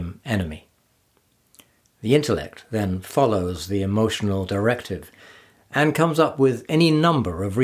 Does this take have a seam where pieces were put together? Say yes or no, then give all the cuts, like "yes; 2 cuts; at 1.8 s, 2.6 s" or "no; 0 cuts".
no; 0 cuts